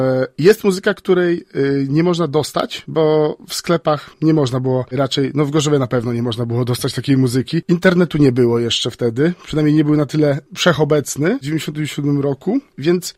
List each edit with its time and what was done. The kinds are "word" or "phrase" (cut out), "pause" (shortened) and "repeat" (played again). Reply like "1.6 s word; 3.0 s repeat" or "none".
4.1 s pause